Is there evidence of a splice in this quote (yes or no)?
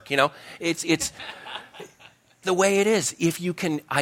yes